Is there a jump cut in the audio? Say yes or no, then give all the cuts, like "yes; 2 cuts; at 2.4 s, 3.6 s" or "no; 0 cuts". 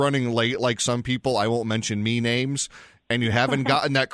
no; 0 cuts